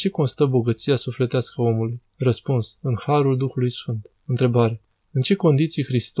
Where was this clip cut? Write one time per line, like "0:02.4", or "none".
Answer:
0:02.1
0:04.2